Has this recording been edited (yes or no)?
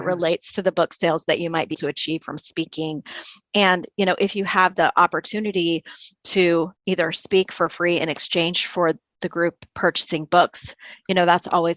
yes